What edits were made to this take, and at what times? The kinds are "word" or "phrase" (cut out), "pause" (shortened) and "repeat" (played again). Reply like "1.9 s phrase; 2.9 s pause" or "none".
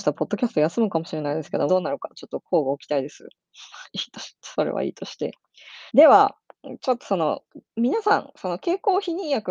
1.7 s phrase; 5.9 s pause; 7.7 s pause